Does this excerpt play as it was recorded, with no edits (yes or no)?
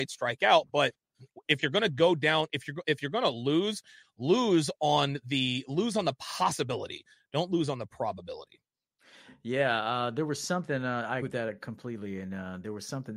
no